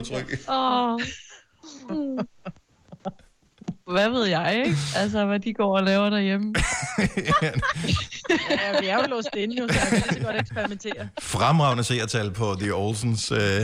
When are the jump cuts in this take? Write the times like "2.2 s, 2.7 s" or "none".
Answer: none